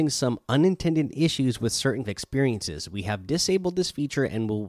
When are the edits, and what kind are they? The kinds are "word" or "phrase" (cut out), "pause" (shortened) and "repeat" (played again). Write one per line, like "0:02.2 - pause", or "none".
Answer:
0:02.0 - word